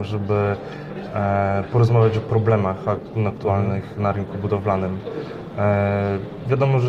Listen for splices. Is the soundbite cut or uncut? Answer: uncut